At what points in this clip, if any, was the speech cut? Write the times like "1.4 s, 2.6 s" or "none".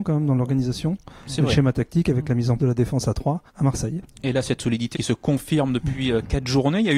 2.6 s, 3.5 s, 4.9 s